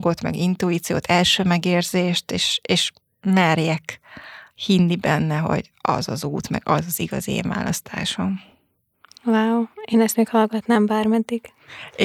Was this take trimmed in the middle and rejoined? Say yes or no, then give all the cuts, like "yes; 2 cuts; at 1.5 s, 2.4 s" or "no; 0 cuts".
no; 0 cuts